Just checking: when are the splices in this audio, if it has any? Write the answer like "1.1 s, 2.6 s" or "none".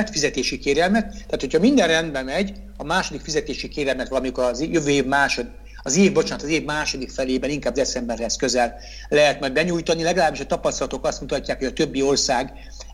none